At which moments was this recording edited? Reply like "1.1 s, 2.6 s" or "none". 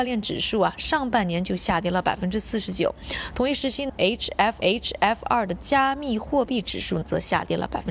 4.6 s

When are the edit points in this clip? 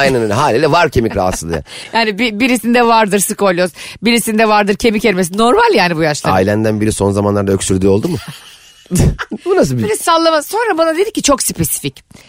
none

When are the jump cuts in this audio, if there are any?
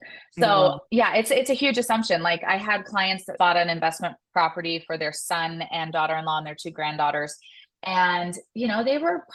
3.4 s

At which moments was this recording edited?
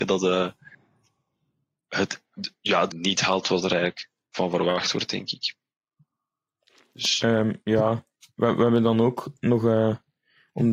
2.9 s

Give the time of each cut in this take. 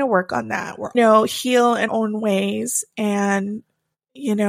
0.9 s, 1.9 s

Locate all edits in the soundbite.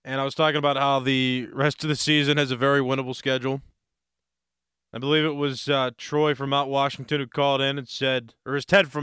none

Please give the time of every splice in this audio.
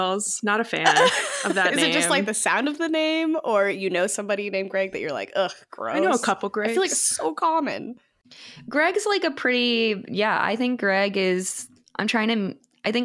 none

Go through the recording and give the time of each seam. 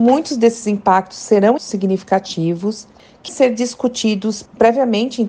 1.6 s, 3.3 s

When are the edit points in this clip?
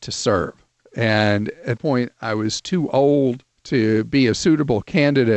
1.8 s, 3.5 s

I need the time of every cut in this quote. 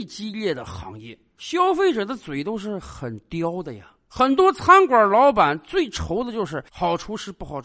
none

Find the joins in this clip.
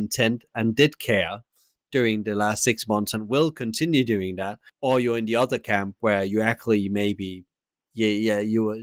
4.7 s

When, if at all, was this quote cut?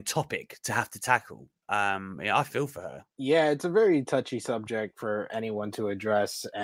3.1 s

